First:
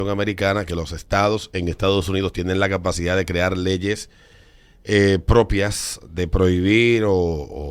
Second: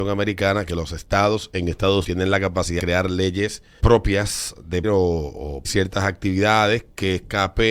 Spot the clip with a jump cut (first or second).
second